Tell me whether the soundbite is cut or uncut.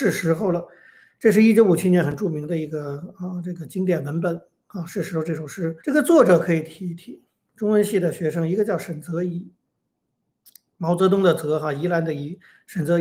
cut